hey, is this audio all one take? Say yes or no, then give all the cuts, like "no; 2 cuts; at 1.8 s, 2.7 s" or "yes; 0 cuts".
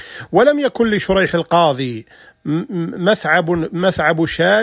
yes; 0 cuts